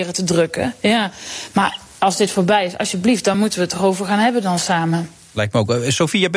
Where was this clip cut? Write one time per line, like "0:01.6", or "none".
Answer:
none